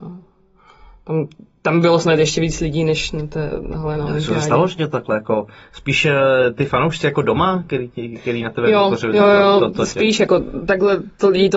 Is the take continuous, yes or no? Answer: yes